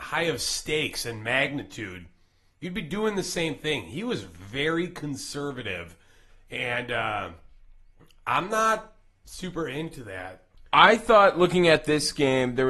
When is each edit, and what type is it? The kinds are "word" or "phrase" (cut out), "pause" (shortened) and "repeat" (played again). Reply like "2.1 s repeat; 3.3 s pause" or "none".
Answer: none